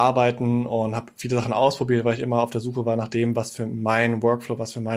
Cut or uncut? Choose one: uncut